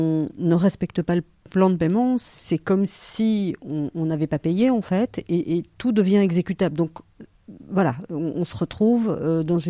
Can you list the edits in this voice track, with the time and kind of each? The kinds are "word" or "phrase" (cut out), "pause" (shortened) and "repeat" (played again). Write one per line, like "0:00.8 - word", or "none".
none